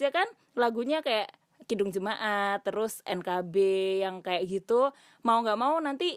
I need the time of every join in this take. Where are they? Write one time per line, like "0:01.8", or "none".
none